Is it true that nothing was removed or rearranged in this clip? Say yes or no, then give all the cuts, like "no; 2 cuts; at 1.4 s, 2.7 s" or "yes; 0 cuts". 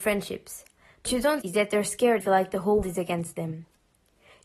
no; 4 cuts; at 1.0 s, 1.4 s, 2.2 s, 2.8 s